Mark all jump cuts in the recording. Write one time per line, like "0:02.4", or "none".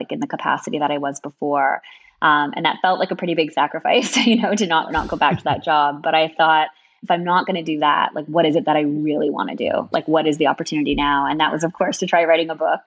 none